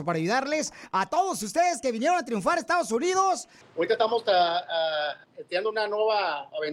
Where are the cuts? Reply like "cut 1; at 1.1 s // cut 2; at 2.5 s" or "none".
cut 1; at 3.6 s // cut 2; at 5.2 s

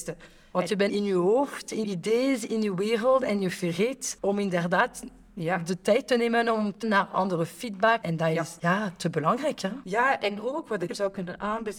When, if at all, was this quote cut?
cut 1; at 1.8 s // cut 2; at 6.8 s // cut 3; at 10.9 s

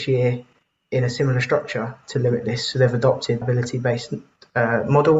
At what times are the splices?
cut 1; at 3.4 s

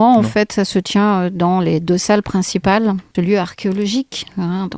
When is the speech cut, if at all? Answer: cut 1; at 3.1 s

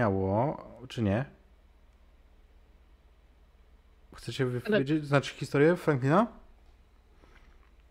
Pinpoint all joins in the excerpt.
none

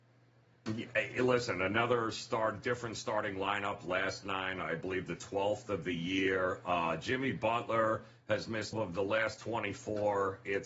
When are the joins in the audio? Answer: cut 1; at 8.7 s

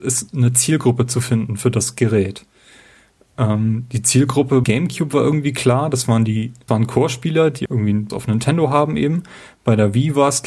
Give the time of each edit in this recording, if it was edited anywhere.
cut 1; at 4.6 s // cut 2; at 6.7 s // cut 3; at 7.7 s // cut 4; at 8.1 s

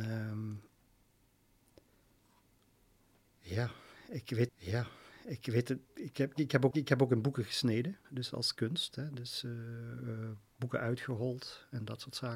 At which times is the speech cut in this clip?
cut 1; at 4.5 s // cut 2; at 6.7 s // cut 3; at 8.0 s

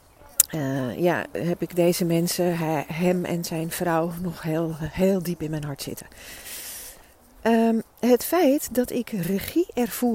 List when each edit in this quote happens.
none

